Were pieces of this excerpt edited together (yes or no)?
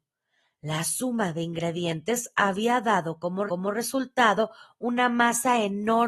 yes